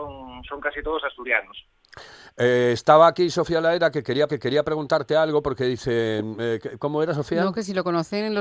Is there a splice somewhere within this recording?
yes; 1 cut; at 4.3 s

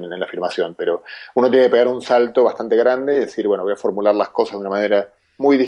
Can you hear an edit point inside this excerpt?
no; 0 cuts

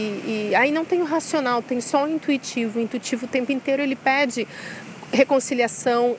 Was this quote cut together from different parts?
no; 0 cuts

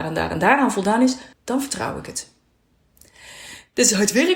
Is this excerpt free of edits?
no; 1 cut; at 1.3 s

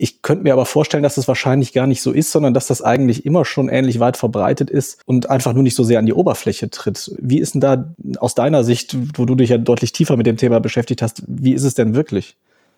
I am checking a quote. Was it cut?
yes; 1 cut; at 5.0 s

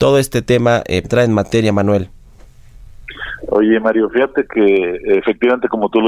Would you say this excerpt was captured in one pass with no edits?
no; 1 cut; at 1.0 s

